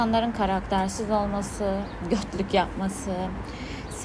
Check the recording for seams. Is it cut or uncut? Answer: uncut